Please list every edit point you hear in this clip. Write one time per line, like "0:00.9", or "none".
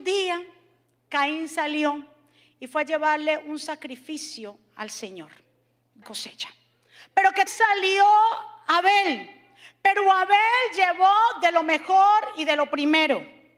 0:06.0
0:07.5